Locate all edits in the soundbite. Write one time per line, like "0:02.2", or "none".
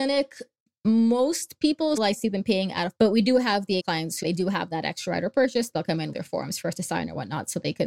0:02.0
0:03.0
0:03.8
0:04.2
0:06.1